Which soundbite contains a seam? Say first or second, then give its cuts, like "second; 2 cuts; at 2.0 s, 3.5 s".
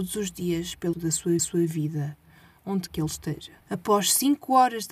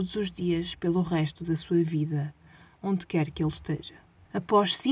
first; 4 cuts; at 0.9 s, 1.4 s, 2.9 s, 3.6 s